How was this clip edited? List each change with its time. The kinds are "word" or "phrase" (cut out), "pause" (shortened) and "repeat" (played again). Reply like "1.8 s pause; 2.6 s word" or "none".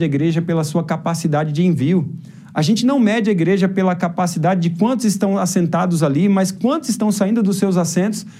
none